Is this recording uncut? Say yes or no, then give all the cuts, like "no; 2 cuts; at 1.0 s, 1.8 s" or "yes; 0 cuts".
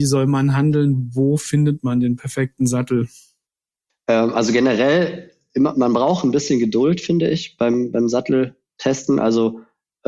yes; 0 cuts